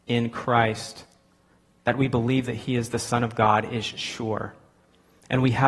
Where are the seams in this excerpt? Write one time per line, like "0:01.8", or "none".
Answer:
none